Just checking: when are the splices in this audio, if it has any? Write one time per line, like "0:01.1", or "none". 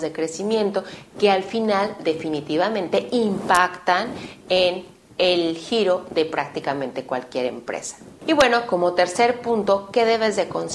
none